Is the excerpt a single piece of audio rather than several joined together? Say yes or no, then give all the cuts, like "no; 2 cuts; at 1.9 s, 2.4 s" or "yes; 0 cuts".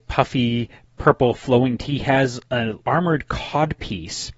no; 2 cuts; at 1.8 s, 2.8 s